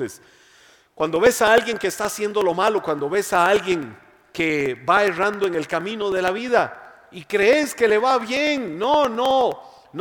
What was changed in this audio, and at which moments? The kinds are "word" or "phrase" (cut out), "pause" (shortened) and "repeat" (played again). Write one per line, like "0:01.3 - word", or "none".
none